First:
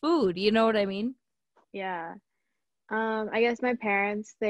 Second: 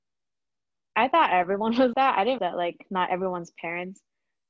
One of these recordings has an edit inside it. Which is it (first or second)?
second